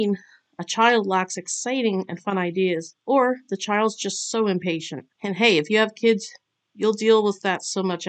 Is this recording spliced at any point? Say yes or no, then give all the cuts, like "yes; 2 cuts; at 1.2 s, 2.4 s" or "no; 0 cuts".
yes; 1 cut; at 5.1 s